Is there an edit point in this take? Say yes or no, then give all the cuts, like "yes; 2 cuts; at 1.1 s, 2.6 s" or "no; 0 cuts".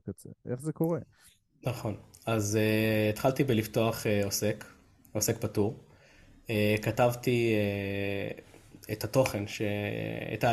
no; 0 cuts